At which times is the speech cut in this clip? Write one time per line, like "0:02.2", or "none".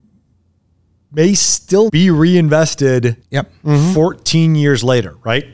0:01.9
0:03.2